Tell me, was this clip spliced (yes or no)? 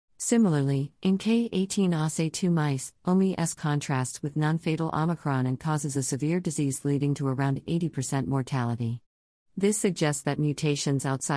no